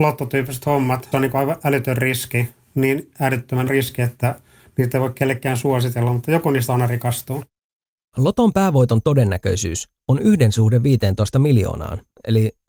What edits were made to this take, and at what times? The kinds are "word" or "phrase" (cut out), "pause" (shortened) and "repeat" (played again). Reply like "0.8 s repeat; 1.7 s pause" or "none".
1.1 s word; 3.7 s word